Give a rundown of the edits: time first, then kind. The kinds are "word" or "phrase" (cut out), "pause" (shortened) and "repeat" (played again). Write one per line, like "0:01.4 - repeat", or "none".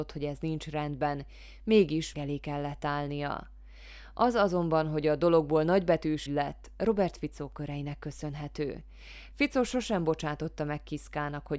0:02.1 - word
0:06.3 - word